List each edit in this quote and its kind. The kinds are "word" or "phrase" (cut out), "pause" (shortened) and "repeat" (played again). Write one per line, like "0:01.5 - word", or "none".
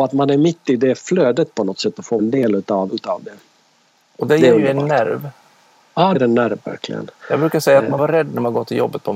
0:02.2 - word
0:02.9 - word
0:06.1 - word
0:08.0 - word